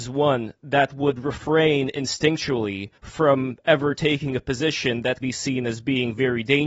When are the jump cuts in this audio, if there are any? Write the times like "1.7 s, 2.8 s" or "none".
3.0 s, 5.2 s